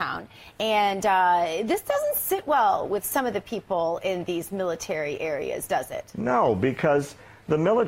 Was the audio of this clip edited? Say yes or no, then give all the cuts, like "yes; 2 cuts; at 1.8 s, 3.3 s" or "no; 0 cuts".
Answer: no; 0 cuts